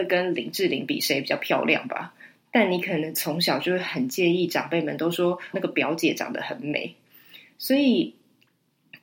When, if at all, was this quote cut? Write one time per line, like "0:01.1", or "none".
0:05.5